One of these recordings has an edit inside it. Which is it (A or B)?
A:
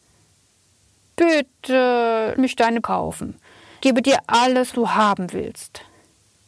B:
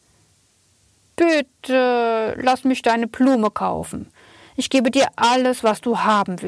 A